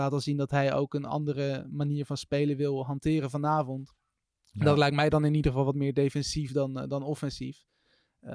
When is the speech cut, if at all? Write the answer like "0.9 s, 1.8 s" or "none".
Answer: none